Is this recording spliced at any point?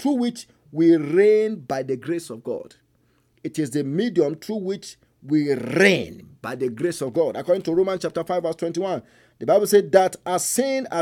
no; 0 cuts

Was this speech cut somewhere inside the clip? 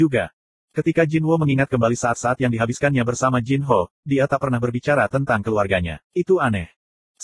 yes; 1 cut; at 6.1 s

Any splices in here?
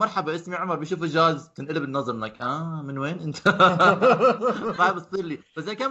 no; 0 cuts

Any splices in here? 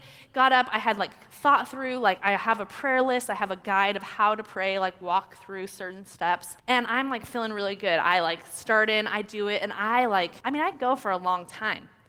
yes; 2 cuts; at 6.6 s, 10.4 s

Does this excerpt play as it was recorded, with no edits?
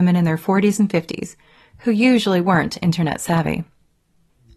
yes; 0 cuts

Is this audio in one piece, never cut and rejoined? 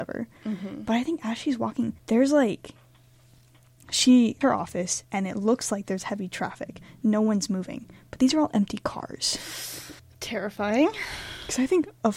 no; 3 cuts; at 2.0 s, 4.4 s, 10.0 s

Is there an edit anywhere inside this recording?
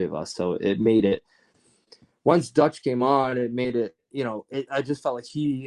no; 0 cuts

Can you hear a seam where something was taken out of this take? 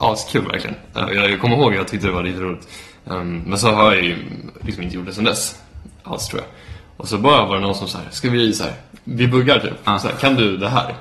no; 0 cuts

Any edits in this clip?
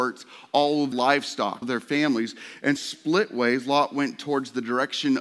yes; 3 cuts; at 0.9 s, 1.6 s, 2.8 s

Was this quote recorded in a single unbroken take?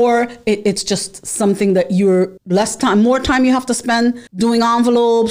no; 2 cuts; at 2.4 s, 4.3 s

